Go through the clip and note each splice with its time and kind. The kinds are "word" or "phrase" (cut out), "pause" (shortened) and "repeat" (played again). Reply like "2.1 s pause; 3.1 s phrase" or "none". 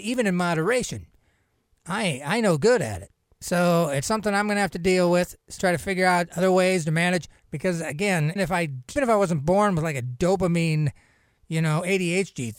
5.6 s phrase; 7.4 s pause; 8.4 s word; 9.0 s word